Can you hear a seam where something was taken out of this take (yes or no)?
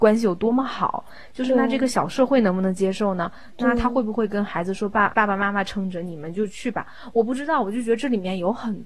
yes